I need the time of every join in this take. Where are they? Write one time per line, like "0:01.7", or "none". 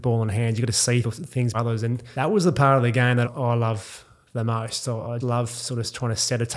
0:01.0
0:01.5
0:03.2
0:05.2

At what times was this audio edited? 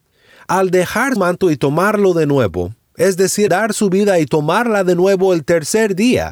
0:01.2
0:03.5

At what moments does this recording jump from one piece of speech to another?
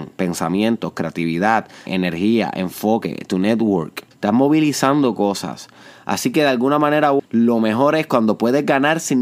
0:01.9
0:04.1
0:07.2

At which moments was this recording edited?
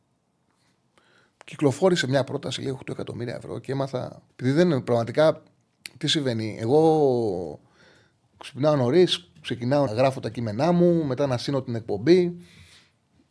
0:04.3
0:09.9

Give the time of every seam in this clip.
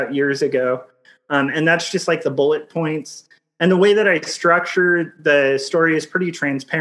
none

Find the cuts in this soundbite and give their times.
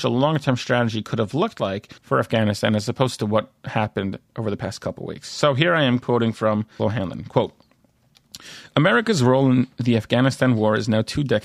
0:02.0
0:06.8

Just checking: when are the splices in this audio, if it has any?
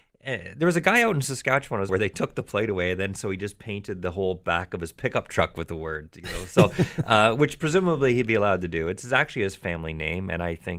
0:01.9

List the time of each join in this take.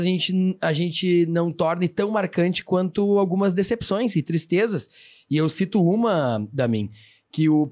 none

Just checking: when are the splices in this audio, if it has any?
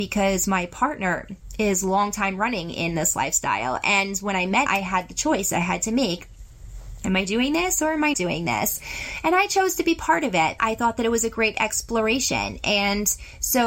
0:04.7
0:08.1
0:10.6

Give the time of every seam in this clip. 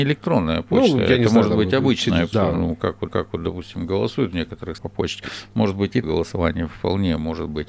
0:02.3
0:03.1
0:04.8
0:06.0

